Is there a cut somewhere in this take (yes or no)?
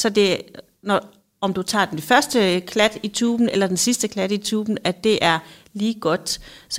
no